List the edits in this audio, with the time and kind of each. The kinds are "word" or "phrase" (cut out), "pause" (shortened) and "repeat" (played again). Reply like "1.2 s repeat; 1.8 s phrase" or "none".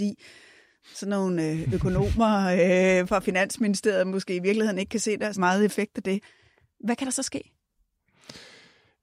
5.3 s word